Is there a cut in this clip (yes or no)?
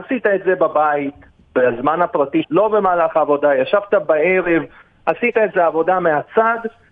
yes